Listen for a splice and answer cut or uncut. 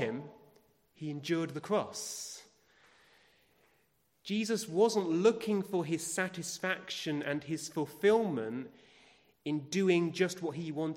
uncut